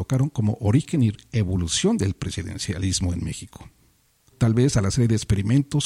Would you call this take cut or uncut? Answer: cut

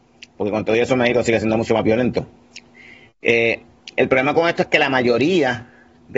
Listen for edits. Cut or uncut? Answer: uncut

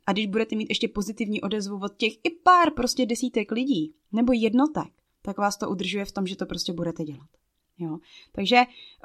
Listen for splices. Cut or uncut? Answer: cut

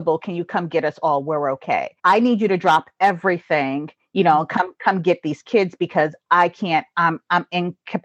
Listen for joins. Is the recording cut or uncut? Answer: cut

